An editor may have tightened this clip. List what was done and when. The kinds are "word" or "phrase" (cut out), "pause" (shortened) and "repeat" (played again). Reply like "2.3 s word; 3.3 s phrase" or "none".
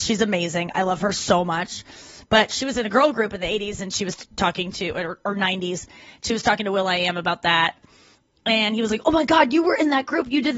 none